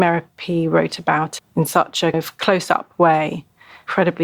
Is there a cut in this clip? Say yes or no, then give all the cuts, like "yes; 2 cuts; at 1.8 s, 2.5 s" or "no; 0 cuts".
yes; 2 cuts; at 1.4 s, 2.1 s